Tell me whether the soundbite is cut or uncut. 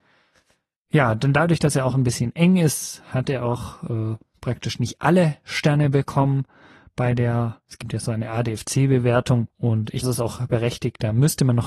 cut